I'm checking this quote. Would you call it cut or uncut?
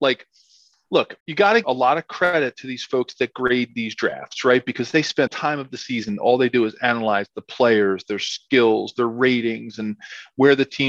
cut